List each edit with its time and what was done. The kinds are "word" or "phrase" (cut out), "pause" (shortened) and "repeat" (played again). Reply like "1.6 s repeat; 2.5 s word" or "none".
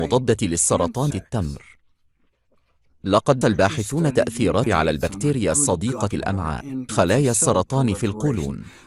1.1 s word; 3.4 s word; 4.7 s word; 6.1 s word; 6.9 s word